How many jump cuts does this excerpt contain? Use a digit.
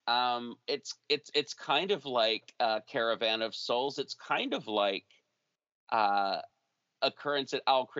0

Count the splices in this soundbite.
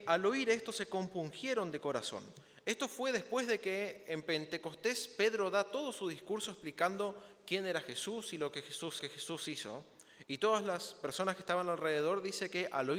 1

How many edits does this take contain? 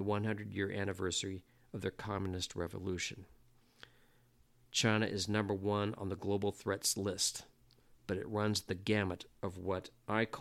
0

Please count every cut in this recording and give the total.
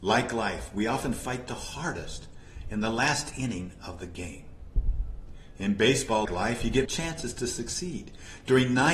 2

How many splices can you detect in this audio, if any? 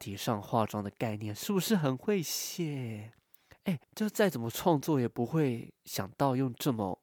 2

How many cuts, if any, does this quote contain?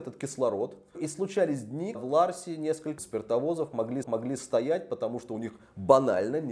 4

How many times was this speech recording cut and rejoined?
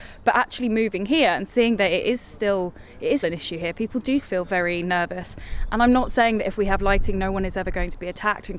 2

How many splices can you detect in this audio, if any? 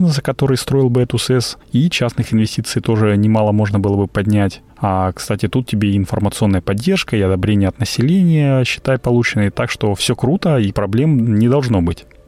1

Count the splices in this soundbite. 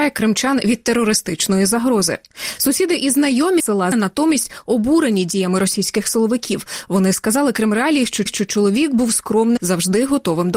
4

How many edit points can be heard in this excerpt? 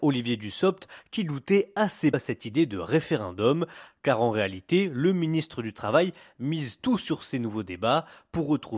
1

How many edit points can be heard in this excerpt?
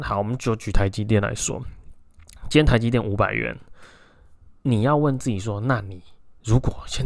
1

